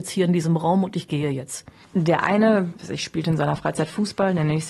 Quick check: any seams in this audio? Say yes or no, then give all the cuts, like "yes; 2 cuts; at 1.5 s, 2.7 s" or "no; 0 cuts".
yes; 1 cut; at 2.8 s